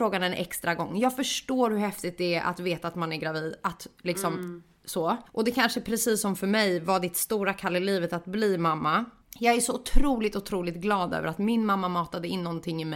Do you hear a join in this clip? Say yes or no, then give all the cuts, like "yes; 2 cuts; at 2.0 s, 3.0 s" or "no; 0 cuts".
yes; 2 cuts; at 5.3 s, 9.2 s